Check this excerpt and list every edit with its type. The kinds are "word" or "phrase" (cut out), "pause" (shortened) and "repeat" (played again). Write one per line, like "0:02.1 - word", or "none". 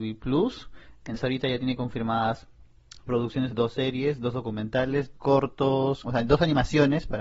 0:01.1 - word
0:03.1 - word
0:03.5 - word
0:05.1 - word
0:06.0 - word